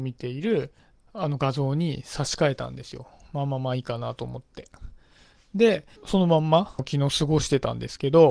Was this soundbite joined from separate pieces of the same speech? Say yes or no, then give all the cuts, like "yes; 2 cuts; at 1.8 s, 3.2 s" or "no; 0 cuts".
no; 0 cuts